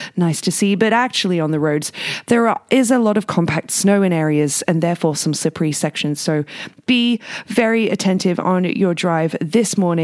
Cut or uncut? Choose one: uncut